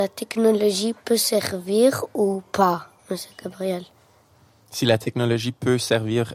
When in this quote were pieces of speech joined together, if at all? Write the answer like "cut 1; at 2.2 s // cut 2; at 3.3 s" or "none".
cut 1; at 3.0 s